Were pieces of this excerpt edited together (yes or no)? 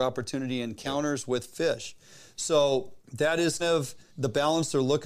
yes